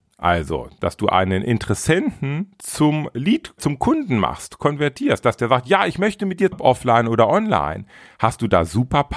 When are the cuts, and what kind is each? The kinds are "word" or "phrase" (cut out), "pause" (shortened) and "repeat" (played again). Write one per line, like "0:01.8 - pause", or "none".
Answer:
0:03.6 - word
0:06.5 - phrase

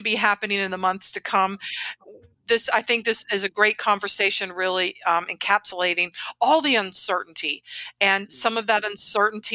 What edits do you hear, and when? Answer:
none

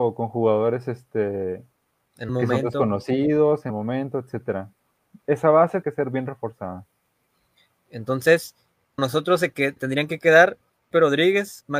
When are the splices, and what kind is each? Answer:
0:02.3 - word
0:03.7 - word
0:05.8 - word
0:09.0 - word
0:09.8 - word
0:10.9 - word

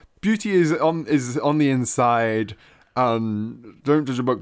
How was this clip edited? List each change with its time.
none

